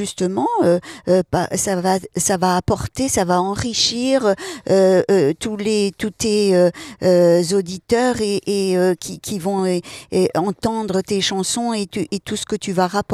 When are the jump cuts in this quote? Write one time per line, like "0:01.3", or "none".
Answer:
none